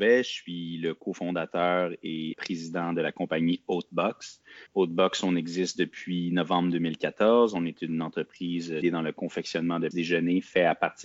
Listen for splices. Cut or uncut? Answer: cut